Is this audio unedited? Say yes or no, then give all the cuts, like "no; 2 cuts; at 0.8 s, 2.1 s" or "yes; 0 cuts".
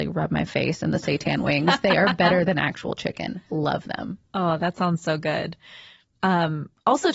yes; 0 cuts